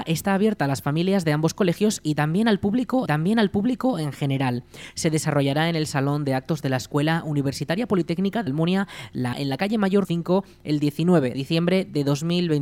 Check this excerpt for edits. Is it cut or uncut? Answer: cut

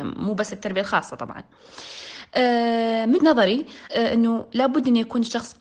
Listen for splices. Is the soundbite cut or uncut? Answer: cut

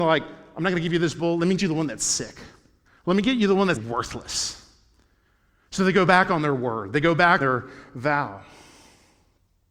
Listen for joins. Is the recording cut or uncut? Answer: cut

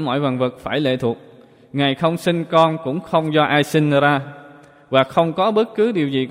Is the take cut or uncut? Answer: uncut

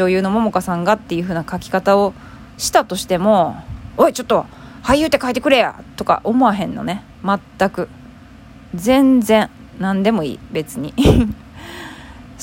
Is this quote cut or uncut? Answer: uncut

